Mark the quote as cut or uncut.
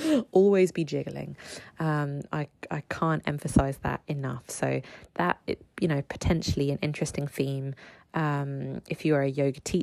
uncut